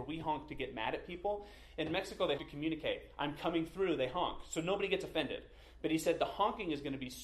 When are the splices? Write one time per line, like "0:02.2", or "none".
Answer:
0:02.4